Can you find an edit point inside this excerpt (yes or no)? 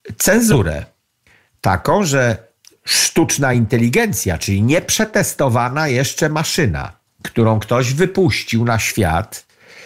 no